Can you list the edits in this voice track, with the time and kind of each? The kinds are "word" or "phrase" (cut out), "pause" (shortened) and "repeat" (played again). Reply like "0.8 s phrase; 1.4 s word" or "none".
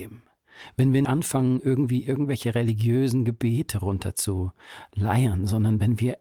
1.0 s word